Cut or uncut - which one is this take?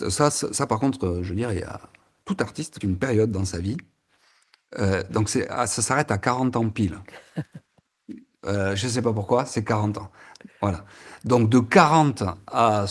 cut